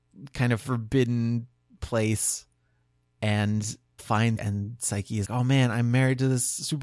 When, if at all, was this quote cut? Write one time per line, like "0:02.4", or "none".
0:04.0
0:04.4
0:05.2